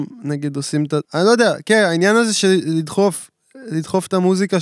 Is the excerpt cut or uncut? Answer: cut